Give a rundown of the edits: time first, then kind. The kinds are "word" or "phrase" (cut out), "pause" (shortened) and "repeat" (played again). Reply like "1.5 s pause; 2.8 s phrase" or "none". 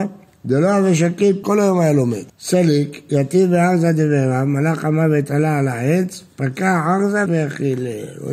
1.4 s word; 2.3 s pause; 7.3 s word